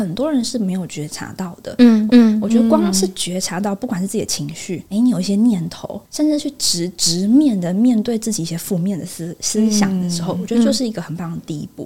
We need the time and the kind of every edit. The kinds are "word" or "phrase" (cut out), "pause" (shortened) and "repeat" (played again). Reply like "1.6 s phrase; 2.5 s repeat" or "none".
2.1 s repeat; 6.0 s pause